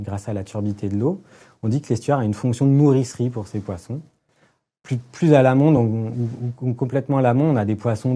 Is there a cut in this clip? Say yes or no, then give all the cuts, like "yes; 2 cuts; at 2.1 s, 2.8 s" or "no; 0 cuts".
no; 0 cuts